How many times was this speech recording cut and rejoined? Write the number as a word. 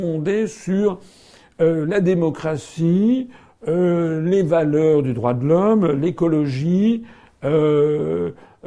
zero